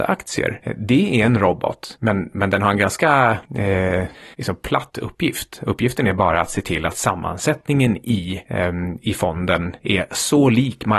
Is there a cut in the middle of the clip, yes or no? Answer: no